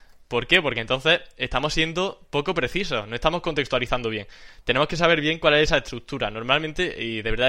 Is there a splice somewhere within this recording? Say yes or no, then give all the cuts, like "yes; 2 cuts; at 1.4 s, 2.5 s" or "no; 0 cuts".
no; 0 cuts